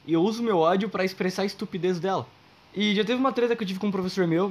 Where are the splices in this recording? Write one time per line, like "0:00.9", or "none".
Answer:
0:02.5